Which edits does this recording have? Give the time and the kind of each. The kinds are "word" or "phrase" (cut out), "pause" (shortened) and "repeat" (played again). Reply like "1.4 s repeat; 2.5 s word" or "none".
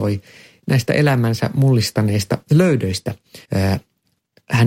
3.4 s pause